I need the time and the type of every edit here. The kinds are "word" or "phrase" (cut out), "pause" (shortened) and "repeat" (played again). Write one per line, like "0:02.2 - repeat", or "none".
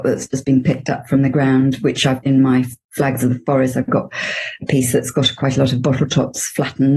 0:02.2 - word